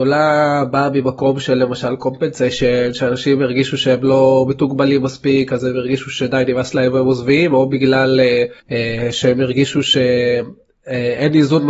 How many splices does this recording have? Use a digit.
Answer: 1